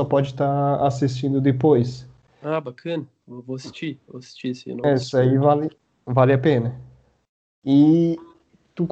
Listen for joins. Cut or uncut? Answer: uncut